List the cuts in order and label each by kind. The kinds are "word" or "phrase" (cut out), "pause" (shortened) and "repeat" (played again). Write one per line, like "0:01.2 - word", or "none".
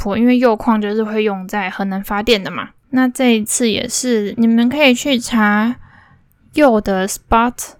0:02.8 - pause